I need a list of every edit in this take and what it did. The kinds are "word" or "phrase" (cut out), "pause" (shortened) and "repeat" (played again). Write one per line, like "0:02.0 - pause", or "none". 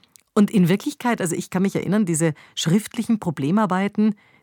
none